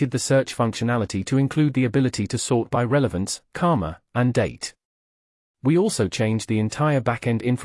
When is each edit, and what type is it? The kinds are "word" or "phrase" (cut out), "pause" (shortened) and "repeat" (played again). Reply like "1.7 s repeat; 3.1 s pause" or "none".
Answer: none